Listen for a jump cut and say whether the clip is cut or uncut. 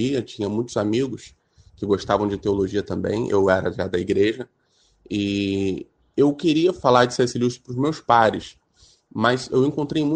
uncut